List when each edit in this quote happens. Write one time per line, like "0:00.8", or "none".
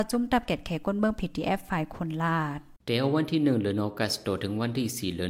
0:02.8